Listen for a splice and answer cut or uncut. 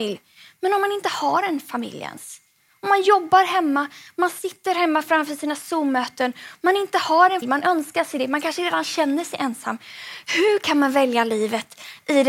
cut